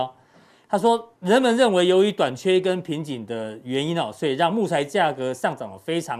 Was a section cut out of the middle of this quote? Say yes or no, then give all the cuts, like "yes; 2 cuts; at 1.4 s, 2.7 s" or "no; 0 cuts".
yes; 1 cut; at 1.2 s